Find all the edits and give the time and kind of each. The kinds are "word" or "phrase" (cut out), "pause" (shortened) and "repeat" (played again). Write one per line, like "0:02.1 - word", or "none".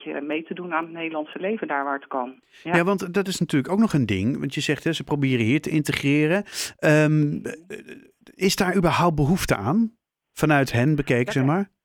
none